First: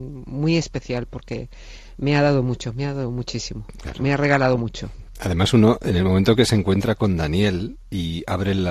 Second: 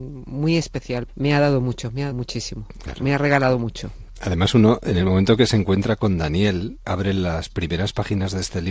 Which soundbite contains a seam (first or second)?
second